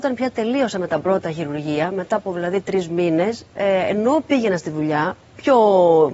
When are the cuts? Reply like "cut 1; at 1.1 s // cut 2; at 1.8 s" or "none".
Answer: none